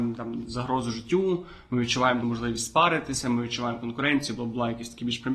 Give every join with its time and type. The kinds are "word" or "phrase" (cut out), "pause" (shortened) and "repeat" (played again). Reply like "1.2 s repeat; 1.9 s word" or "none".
2.2 s phrase